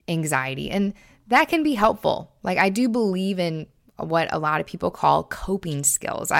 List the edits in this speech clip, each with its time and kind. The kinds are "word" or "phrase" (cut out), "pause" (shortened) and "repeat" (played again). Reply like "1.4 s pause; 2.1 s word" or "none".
none